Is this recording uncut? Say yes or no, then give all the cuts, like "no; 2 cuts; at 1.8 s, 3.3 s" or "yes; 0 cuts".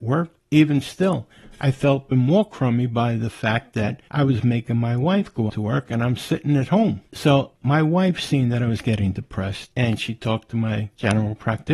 no; 2 cuts; at 2.1 s, 5.5 s